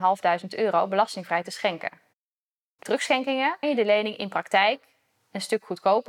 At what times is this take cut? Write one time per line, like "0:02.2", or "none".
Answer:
0:02.8
0:03.6